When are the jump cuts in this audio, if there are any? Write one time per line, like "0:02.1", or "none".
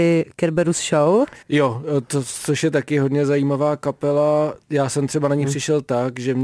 0:01.4
0:04.6